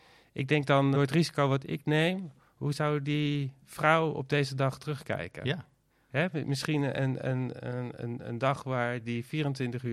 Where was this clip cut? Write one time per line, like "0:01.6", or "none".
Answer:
0:00.9